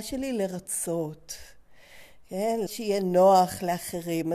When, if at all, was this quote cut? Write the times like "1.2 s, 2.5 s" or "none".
2.7 s